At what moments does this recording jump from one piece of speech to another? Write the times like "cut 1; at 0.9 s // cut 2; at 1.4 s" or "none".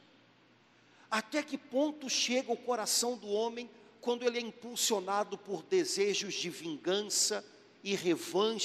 none